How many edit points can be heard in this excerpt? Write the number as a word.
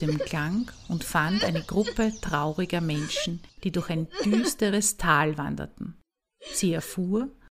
one